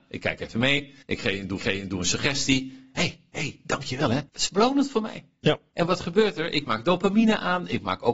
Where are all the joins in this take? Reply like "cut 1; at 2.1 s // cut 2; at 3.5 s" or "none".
cut 1; at 1.0 s // cut 2; at 1.6 s // cut 3; at 4.3 s